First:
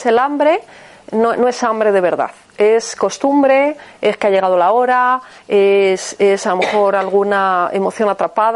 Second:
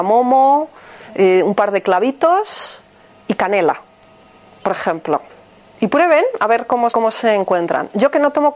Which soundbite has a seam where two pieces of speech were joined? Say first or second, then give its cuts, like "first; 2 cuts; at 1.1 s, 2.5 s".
second; 1 cut; at 6.9 s